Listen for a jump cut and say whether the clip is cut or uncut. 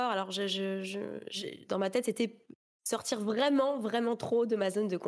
uncut